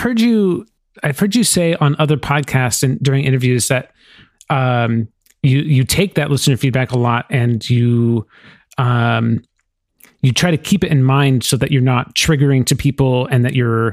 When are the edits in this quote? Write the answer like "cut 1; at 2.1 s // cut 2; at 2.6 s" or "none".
none